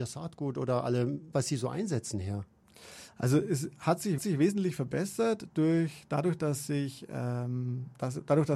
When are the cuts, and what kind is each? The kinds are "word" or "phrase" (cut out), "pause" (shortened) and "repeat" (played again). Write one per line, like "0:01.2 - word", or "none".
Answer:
0:01.3 - word
0:04.2 - repeat